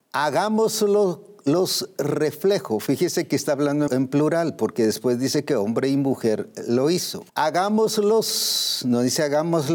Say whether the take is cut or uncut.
cut